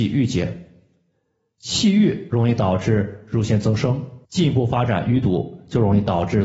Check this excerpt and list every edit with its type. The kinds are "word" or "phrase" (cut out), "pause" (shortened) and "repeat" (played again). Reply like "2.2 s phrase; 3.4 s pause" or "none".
4.2 s pause